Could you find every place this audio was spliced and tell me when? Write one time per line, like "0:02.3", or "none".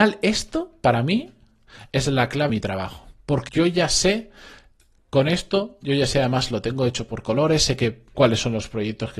0:02.5
0:03.5
0:08.1